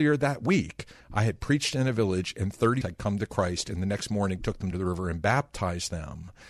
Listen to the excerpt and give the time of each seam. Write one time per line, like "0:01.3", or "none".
0:02.8
0:04.7